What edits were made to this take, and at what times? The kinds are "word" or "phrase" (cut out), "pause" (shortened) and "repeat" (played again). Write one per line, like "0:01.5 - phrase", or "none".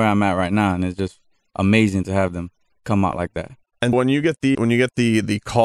0:03.9 - word
0:04.5 - word